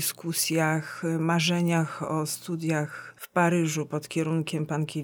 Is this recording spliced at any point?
no; 0 cuts

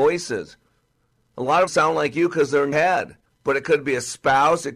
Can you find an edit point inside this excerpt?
yes; 3 cuts; at 1.7 s, 2.7 s, 3.3 s

